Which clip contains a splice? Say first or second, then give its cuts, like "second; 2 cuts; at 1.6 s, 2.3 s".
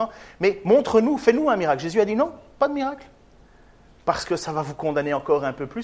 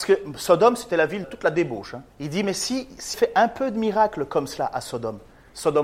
second; 3 cuts; at 1.2 s, 2.1 s, 3.1 s